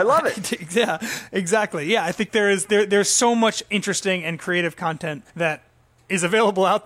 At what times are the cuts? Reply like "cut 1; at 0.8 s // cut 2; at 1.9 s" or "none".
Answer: cut 1; at 5.3 s